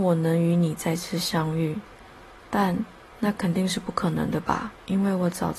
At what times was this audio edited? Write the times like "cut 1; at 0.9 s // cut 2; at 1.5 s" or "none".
none